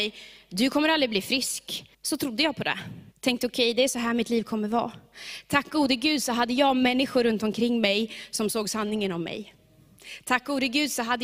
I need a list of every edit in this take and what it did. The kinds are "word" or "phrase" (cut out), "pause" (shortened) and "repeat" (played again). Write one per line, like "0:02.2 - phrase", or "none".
0:01.9 - pause
0:03.1 - pause